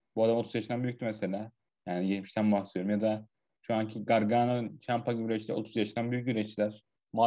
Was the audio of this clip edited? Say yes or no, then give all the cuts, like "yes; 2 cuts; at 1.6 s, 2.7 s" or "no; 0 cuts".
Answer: no; 0 cuts